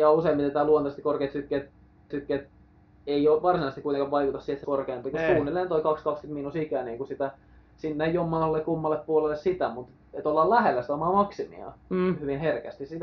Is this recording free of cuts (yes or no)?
no